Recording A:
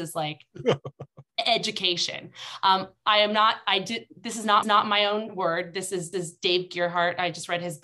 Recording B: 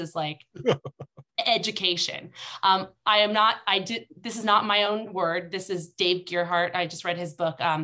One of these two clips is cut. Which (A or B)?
A